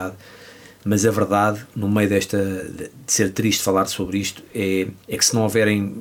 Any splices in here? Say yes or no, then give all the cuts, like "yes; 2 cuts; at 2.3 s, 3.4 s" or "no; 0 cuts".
yes; 1 cut; at 5.0 s